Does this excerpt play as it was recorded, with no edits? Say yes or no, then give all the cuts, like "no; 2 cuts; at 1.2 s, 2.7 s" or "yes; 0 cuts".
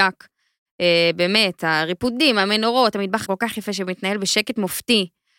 no; 1 cut; at 3.2 s